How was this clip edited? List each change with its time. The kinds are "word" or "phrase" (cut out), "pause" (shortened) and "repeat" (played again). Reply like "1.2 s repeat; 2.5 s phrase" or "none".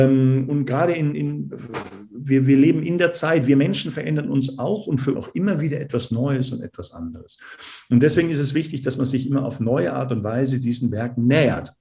1.1 s word; 5.1 s phrase